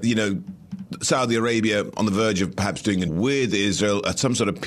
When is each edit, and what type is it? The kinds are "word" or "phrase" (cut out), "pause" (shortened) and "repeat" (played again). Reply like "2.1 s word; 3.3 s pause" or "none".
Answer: 3.1 s word